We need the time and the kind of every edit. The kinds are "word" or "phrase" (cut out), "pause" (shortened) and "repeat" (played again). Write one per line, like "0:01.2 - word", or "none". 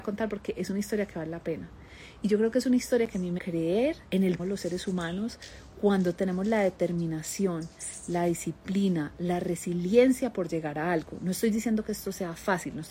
0:03.4 - phrase
0:04.1 - pause
0:04.4 - phrase